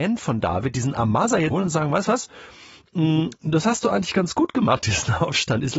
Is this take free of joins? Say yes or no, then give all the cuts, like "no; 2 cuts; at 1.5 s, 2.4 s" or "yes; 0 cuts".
no; 1 cut; at 1.5 s